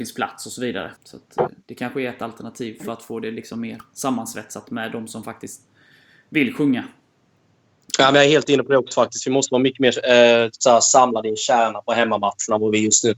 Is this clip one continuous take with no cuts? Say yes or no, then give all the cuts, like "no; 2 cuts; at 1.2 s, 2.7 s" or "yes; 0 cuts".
no; 1 cut; at 1.0 s